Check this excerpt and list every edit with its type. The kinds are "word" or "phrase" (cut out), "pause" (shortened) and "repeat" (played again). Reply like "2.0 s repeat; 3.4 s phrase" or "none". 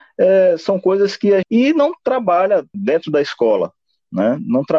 1.4 s phrase; 2.7 s word